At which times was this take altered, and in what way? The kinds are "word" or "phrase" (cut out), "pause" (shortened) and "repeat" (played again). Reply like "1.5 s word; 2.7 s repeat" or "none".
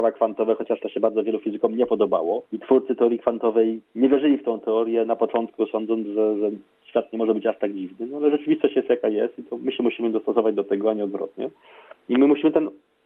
2.5 s pause; 3.9 s pause